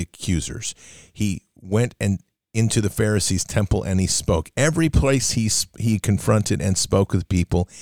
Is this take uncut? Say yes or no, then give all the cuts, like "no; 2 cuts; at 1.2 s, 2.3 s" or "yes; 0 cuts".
yes; 0 cuts